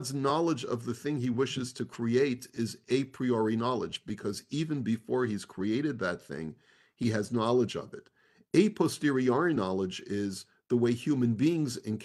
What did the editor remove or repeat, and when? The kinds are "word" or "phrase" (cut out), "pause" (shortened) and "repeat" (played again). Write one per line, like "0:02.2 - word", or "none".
none